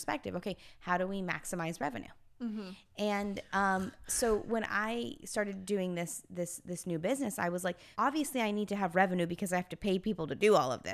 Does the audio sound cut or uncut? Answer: cut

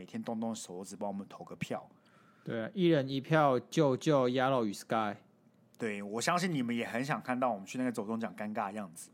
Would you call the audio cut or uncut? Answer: uncut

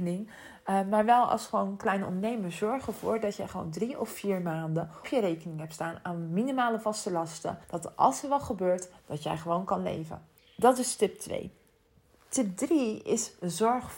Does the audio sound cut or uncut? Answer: cut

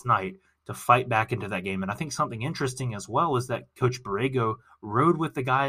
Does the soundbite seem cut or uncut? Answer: uncut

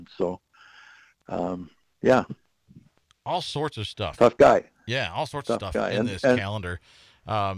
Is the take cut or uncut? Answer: uncut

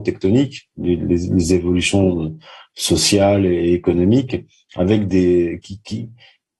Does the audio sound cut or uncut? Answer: uncut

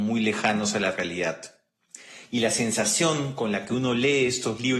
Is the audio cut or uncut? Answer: uncut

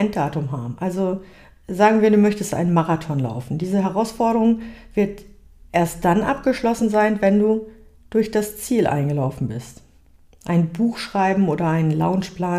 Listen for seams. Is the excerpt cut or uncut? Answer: uncut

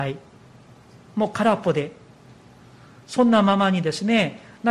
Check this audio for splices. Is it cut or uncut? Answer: uncut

